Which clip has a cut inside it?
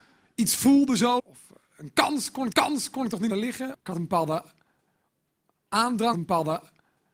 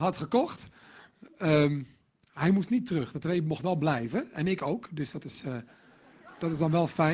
first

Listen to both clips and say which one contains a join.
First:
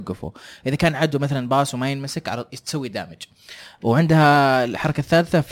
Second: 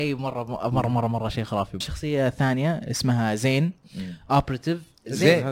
second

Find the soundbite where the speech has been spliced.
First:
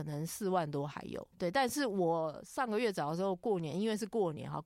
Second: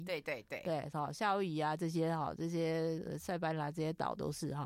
first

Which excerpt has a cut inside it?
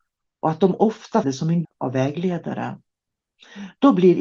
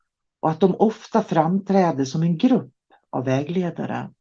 first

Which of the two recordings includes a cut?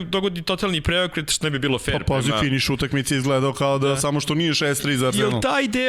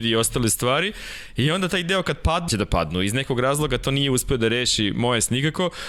second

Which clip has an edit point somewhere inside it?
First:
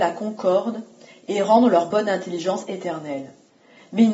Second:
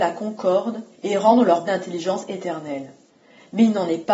second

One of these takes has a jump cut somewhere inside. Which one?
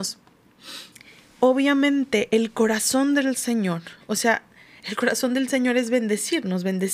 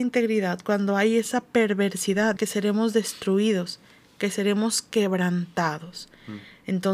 second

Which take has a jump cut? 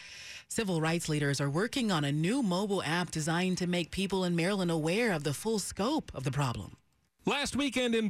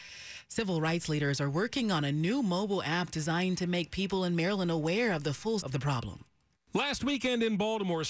second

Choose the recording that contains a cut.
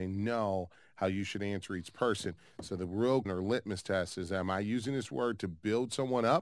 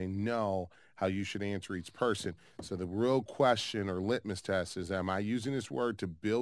first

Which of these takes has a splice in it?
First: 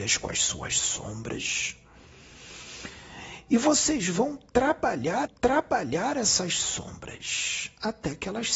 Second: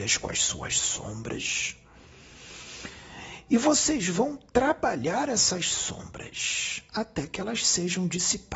first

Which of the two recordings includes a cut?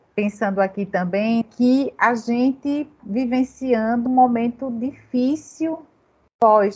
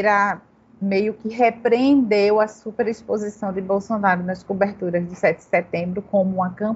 first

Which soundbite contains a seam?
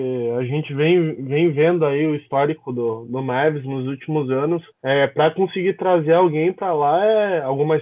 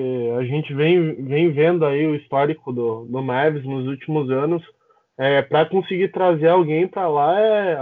first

